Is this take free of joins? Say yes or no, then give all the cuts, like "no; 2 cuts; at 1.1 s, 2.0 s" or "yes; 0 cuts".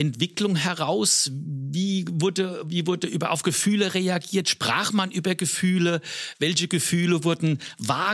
yes; 0 cuts